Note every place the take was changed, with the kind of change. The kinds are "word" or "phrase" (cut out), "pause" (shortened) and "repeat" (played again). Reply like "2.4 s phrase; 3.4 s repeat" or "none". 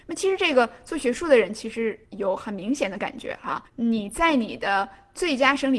2.0 s pause; 3.7 s pause